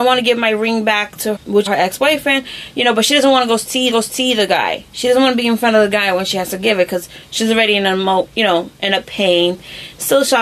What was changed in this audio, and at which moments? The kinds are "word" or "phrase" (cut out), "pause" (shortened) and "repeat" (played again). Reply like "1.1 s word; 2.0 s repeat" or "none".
1.4 s word; 1.7 s word; 3.9 s repeat